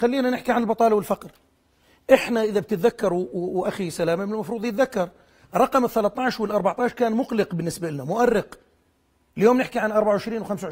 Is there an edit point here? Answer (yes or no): no